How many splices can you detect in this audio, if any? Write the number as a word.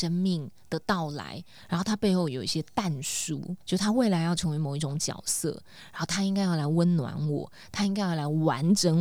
one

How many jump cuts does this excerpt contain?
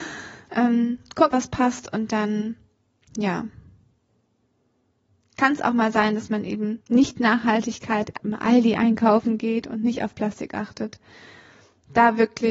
three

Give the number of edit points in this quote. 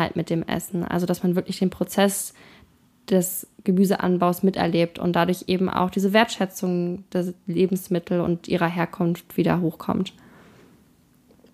zero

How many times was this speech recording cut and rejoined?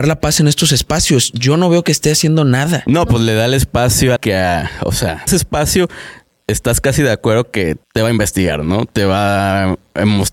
three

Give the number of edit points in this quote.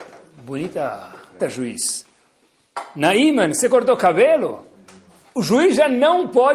one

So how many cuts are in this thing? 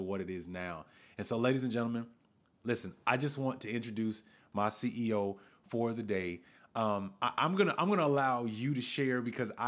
zero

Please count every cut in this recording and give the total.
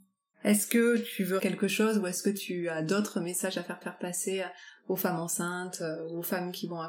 two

